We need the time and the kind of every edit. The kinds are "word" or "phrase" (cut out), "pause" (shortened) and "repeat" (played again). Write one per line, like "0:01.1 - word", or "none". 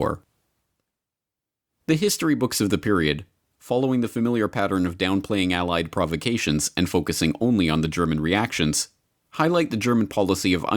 none